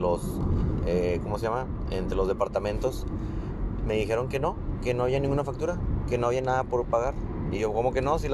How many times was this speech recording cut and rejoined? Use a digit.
0